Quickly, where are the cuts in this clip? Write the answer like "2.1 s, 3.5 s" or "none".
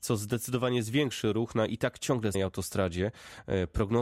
2.3 s